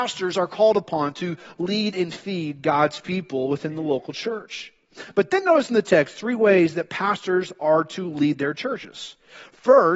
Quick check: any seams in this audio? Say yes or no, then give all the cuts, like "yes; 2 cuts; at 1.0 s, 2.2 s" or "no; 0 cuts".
no; 0 cuts